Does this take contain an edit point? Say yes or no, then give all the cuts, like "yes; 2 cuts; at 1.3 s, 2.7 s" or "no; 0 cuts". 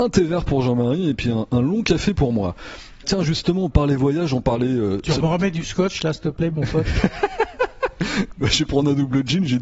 no; 0 cuts